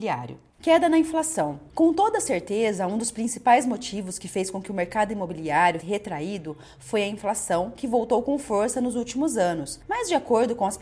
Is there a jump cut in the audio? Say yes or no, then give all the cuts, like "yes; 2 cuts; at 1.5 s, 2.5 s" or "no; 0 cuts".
yes; 1 cut; at 5.8 s